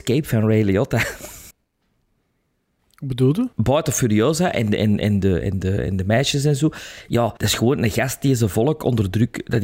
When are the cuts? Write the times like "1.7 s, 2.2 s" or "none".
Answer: 1.5 s, 3.5 s, 7.4 s